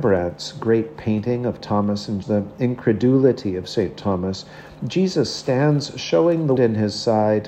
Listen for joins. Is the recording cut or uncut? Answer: cut